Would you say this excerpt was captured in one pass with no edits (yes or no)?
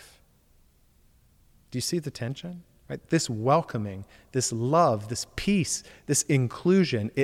yes